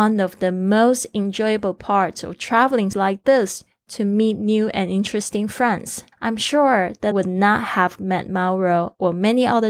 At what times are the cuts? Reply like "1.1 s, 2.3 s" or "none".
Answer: 2.9 s, 6.1 s, 7.1 s

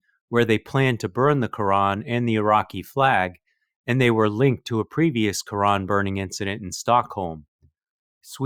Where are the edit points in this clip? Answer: none

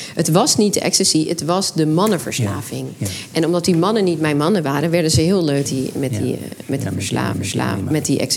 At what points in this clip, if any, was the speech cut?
5.6 s, 7.3 s

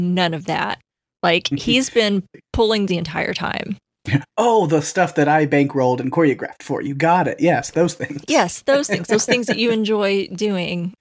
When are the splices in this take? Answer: 2.4 s, 2.9 s

